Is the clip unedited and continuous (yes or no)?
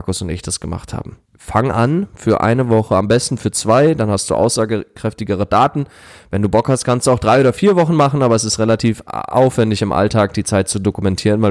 no